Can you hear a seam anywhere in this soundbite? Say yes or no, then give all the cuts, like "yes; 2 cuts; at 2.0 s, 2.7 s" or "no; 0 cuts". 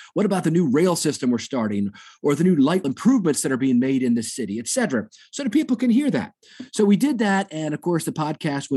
yes; 1 cut; at 2.8 s